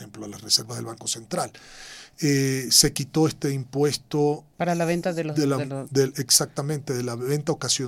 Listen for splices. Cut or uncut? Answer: cut